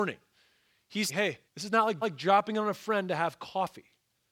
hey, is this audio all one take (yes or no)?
no